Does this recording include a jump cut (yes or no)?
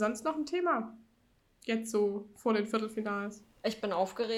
no